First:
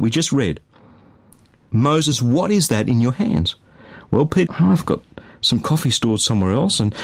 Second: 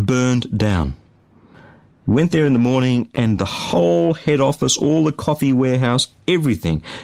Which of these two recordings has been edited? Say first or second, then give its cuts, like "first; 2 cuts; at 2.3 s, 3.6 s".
first; 1 cut; at 4.5 s